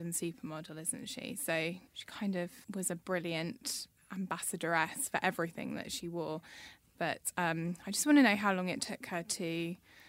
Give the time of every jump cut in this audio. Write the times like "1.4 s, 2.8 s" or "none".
1.9 s, 2.6 s